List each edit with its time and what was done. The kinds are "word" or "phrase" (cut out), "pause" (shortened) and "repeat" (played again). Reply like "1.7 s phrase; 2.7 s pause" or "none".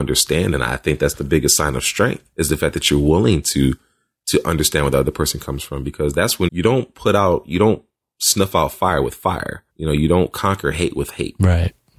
2.3 s pause; 6.5 s word; 9.7 s pause